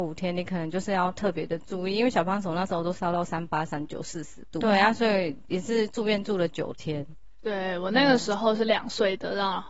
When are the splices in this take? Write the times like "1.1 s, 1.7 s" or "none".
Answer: 4.6 s

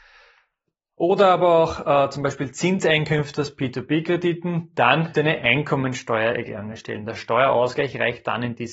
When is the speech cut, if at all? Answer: 5.1 s

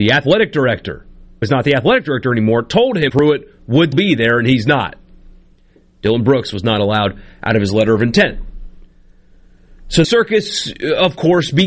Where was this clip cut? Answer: 1.4 s, 3.1 s, 3.9 s, 10.0 s

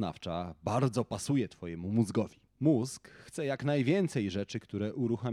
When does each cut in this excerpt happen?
2.5 s

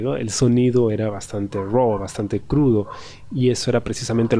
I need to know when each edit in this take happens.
none

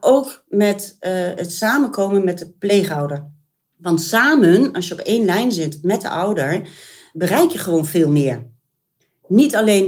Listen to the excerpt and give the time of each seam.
none

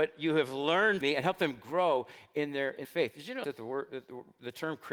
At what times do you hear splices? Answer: 1.0 s, 2.8 s, 3.4 s

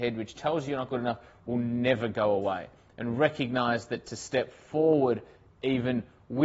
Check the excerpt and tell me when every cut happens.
none

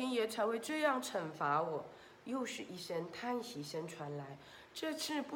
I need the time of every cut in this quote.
none

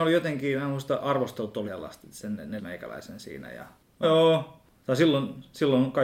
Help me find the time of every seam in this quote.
1.7 s, 2.6 s, 4.0 s

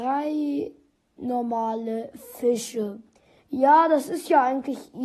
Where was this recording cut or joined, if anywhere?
none

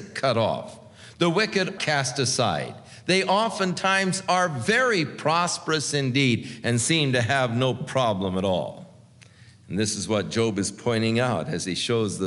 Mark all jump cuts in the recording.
1.8 s

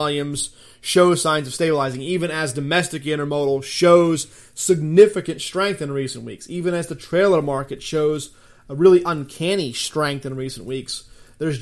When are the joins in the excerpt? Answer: none

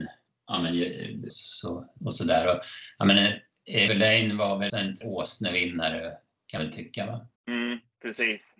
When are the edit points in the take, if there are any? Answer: 1.3 s, 3.9 s, 4.7 s, 5.0 s, 6.6 s, 7.4 s

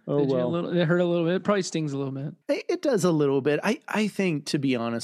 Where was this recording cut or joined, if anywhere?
2.4 s

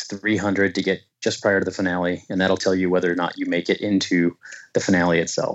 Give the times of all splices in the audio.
none

